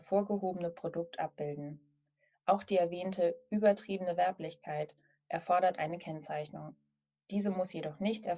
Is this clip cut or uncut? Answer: uncut